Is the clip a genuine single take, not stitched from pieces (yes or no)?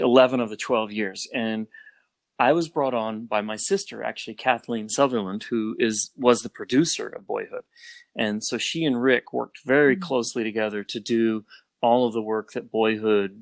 yes